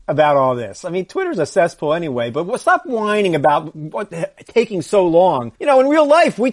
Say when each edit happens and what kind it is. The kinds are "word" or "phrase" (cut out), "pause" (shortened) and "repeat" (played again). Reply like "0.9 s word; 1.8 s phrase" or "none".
5.6 s pause